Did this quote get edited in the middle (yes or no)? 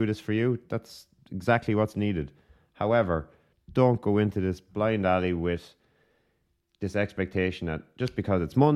no